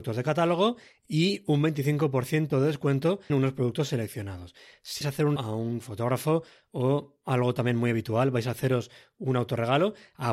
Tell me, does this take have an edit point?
yes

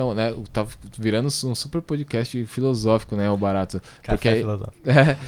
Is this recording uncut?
no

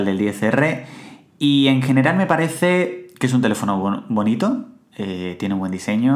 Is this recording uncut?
yes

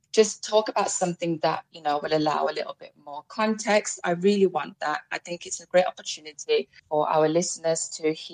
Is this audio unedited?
no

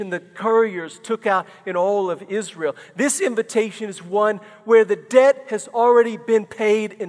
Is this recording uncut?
yes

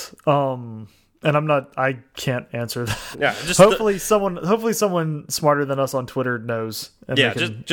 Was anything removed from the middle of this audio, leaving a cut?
yes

